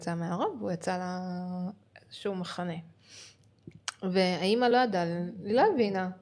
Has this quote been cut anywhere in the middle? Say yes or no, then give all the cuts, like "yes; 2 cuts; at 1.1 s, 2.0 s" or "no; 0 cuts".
no; 0 cuts